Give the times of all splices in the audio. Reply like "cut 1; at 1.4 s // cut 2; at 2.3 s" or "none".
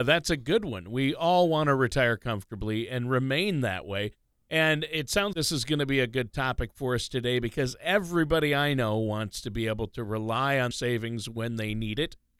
cut 1; at 5.3 s // cut 2; at 10.7 s